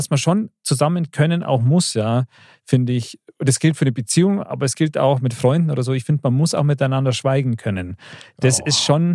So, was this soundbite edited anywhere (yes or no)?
no